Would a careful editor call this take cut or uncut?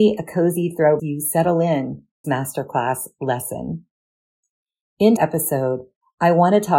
cut